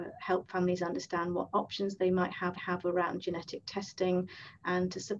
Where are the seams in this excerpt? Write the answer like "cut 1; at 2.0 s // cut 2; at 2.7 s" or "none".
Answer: cut 1; at 2.6 s